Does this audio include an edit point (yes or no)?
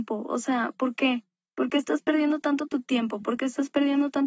no